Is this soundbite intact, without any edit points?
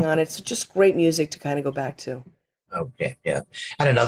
yes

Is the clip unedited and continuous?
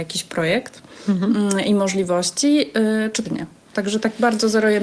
no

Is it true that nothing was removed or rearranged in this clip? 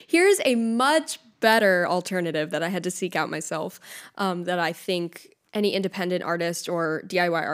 no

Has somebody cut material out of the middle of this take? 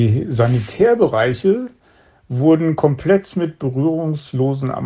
no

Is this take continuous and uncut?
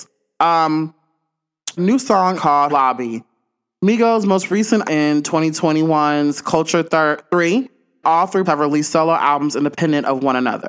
no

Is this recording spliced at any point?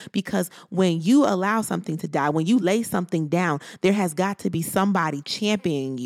no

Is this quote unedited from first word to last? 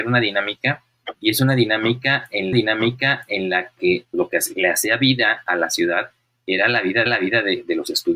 no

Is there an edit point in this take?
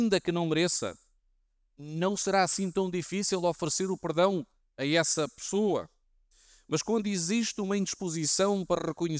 no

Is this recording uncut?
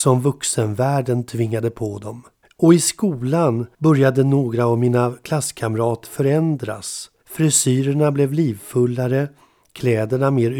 no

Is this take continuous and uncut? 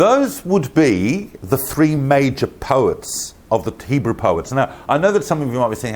yes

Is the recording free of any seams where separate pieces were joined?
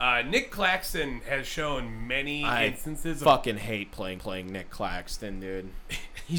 no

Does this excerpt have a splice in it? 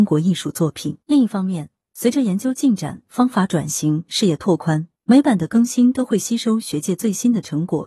yes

